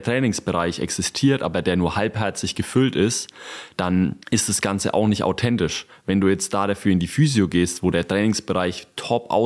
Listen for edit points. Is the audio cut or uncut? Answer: cut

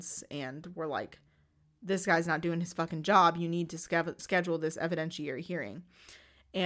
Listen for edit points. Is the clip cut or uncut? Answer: uncut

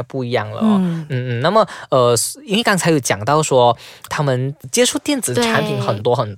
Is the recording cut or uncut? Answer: cut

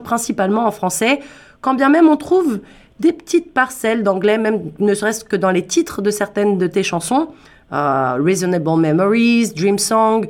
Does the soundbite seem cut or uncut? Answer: uncut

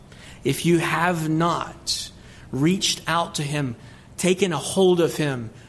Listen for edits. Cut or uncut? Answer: uncut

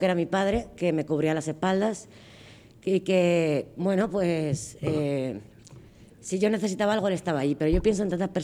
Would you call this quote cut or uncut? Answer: uncut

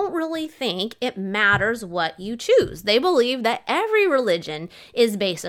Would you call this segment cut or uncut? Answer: uncut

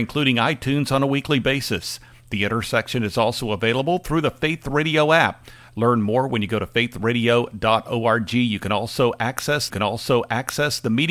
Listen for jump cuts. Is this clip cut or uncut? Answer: cut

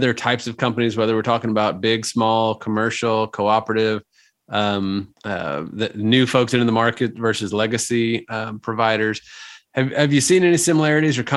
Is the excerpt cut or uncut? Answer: cut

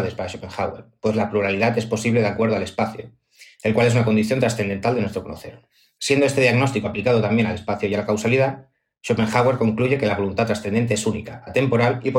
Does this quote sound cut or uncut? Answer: uncut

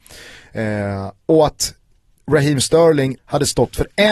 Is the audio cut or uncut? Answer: cut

